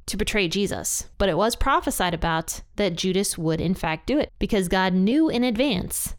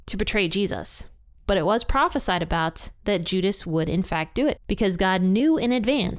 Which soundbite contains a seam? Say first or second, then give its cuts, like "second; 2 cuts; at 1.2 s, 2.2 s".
first; 1 cut; at 1.1 s